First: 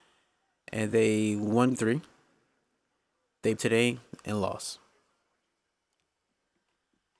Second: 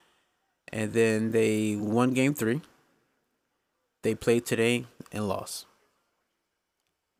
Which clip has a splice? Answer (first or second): first